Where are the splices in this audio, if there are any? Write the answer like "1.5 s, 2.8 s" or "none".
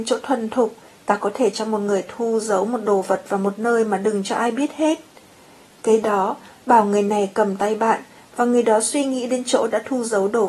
none